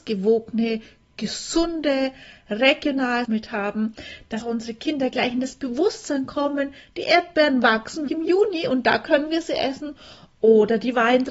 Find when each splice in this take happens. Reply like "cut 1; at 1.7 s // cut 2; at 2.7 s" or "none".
cut 1; at 3.2 s // cut 2; at 4.4 s // cut 3; at 8.1 s